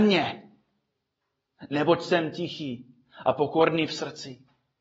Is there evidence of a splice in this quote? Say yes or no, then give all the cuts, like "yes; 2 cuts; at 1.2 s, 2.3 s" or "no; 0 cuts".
no; 0 cuts